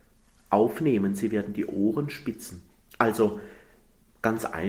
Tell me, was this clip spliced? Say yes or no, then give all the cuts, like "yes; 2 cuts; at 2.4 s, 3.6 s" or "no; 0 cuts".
no; 0 cuts